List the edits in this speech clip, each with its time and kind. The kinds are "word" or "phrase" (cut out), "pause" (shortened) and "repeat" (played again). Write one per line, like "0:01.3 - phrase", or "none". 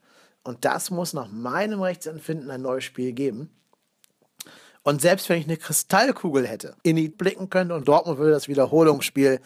0:06.8 - pause
0:07.1 - word
0:07.8 - word